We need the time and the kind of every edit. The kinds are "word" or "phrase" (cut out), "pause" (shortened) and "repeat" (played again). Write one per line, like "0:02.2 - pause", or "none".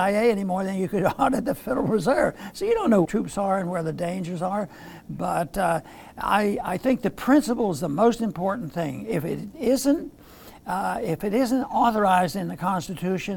0:03.0 - phrase